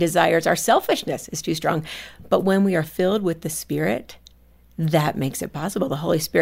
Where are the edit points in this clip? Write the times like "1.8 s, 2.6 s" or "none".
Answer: none